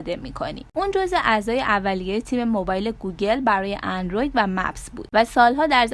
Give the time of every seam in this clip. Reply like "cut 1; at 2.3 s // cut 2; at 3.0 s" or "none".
none